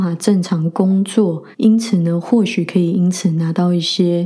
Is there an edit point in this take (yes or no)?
yes